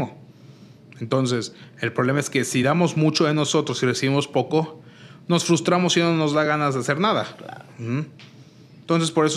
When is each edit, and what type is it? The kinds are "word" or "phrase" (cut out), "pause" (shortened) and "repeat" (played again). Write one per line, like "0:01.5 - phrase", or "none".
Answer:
none